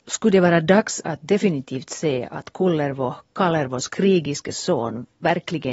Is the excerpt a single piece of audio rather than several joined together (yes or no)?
yes